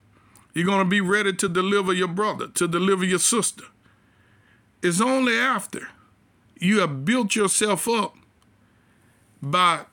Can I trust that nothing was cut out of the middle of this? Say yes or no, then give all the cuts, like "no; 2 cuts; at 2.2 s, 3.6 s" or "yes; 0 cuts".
yes; 0 cuts